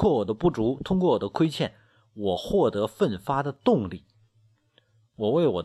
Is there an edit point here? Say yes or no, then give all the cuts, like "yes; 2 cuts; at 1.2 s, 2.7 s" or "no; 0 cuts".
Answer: no; 0 cuts